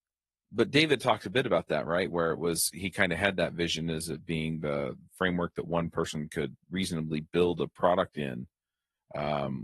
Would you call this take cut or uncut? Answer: uncut